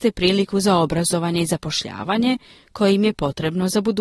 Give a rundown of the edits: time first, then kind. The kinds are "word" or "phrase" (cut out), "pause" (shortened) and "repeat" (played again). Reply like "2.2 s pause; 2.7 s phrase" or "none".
none